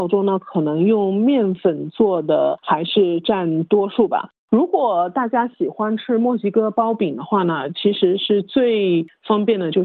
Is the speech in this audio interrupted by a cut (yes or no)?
no